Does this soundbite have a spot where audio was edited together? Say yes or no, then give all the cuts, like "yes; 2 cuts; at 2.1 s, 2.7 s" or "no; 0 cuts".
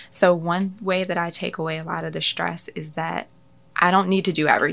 no; 0 cuts